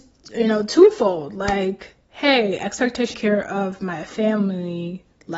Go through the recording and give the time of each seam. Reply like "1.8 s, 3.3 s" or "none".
2.0 s, 3.1 s

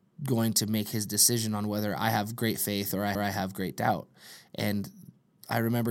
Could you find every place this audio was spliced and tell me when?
3.1 s

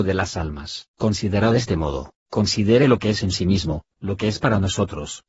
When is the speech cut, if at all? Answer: 0.9 s, 2.2 s

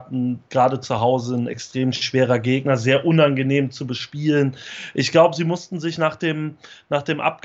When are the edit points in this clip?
none

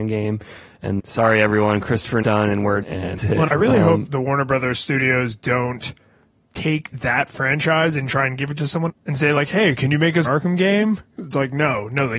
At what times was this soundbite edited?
1.0 s, 2.2 s, 2.8 s, 3.2 s, 3.5 s, 4.1 s, 6.9 s, 8.9 s, 10.2 s

